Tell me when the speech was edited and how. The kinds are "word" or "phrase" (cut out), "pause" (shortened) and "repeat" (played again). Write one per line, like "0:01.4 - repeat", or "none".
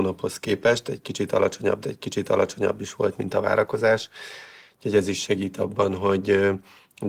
0:01.8 - repeat